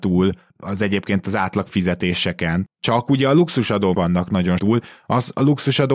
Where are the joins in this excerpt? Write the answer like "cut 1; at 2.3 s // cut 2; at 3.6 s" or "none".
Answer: cut 1; at 3.9 s // cut 2; at 4.6 s